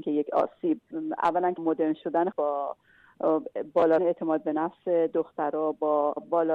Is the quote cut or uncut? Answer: cut